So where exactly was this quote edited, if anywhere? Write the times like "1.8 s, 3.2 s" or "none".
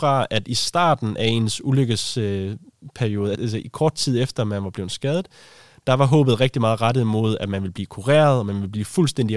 3.3 s